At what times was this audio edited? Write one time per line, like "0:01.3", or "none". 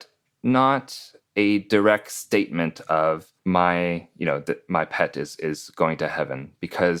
0:01.2
0:03.4